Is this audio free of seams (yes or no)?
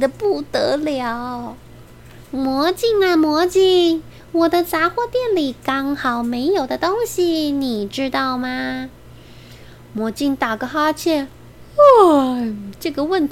yes